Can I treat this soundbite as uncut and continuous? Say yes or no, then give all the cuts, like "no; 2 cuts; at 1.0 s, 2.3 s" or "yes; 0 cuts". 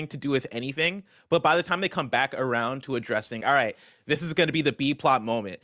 no; 1 cut; at 3.4 s